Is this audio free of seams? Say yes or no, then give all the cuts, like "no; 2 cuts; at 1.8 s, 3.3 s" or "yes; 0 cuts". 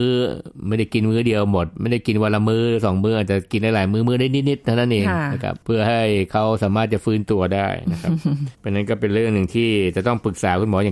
no; 2 cuts; at 5.6 s, 8.5 s